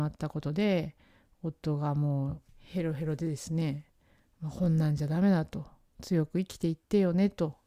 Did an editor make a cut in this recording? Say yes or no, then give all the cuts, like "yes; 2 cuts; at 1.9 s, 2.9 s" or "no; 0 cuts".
yes; 1 cut; at 2.5 s